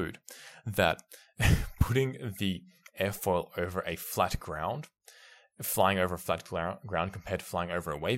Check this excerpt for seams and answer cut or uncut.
uncut